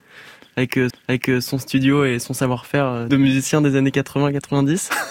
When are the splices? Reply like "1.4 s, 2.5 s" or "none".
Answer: 0.9 s, 3.1 s